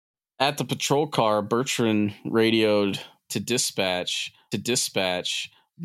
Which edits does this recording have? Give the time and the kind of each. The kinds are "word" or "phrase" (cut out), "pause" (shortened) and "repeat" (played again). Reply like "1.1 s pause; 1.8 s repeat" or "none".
4.5 s repeat